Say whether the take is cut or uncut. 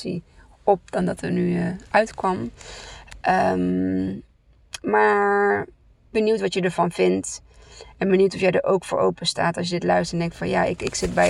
uncut